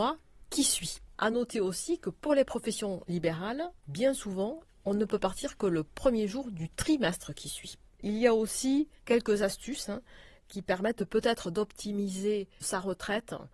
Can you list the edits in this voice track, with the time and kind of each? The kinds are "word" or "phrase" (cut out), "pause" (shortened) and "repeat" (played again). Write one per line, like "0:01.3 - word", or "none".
none

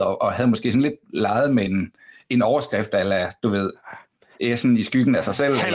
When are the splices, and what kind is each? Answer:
none

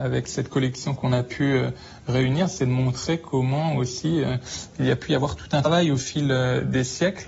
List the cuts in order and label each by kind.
none

